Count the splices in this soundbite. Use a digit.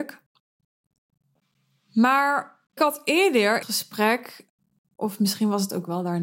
2